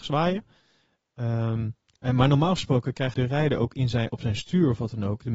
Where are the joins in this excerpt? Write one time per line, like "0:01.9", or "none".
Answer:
0:03.1